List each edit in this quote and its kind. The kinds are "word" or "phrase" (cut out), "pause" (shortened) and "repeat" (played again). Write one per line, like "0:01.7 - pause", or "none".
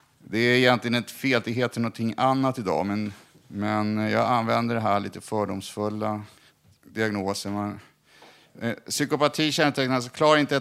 0:03.2 - pause
0:06.4 - pause

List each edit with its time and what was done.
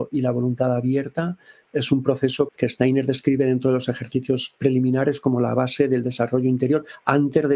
0:02.5 - word

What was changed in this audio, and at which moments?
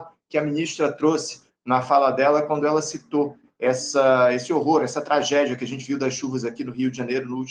none

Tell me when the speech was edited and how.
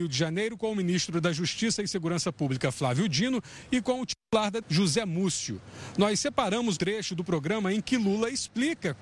0:04.6 - word
0:06.8 - word

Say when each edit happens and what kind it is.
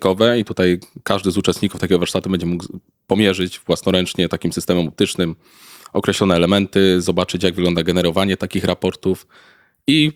none

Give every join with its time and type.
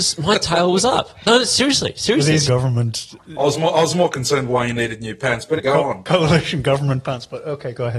0:02.5 - phrase
0:03.2 - word
0:05.6 - word

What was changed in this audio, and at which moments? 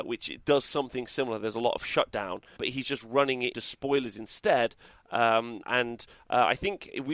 0:02.6 - word
0:03.5 - word
0:05.6 - word

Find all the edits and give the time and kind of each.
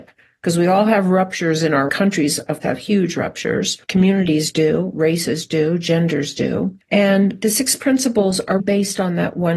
0:01.9 - phrase
0:02.6 - word
0:03.8 - pause
0:08.6 - word

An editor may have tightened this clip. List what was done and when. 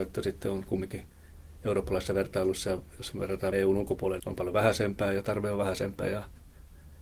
0:03.5 - word
0:04.2 - word

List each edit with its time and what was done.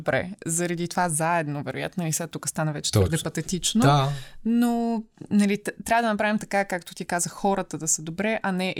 none

